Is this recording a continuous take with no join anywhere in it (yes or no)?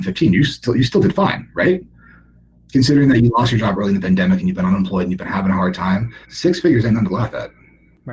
no